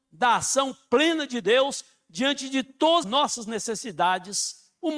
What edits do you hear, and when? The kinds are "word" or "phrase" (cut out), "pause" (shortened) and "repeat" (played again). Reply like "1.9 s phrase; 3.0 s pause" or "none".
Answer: 3.0 s word